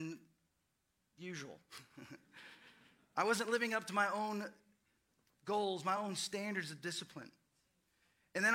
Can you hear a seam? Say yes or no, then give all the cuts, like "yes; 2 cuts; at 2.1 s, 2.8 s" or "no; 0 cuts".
no; 0 cuts